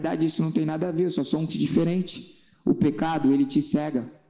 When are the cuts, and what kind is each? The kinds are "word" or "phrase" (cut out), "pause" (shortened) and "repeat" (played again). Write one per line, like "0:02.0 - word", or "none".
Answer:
0:01.5 - word